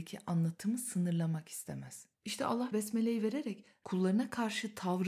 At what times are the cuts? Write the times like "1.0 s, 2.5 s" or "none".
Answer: 2.1 s, 2.7 s